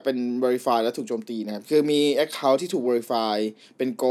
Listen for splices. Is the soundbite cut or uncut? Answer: uncut